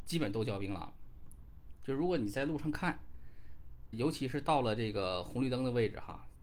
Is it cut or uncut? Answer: cut